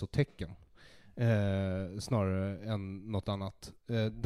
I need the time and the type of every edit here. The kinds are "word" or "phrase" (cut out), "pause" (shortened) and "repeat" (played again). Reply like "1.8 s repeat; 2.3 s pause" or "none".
none